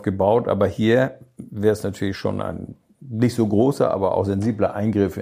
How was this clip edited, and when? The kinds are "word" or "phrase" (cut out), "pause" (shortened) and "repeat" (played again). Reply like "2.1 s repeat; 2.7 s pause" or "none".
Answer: none